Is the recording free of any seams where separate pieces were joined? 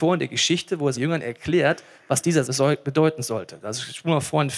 no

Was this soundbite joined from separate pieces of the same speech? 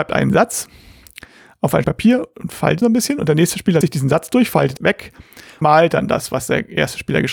yes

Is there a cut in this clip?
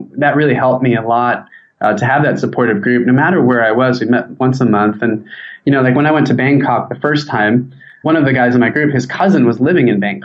no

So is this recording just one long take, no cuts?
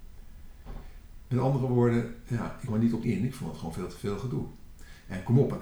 no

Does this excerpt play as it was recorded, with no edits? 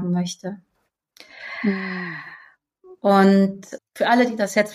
no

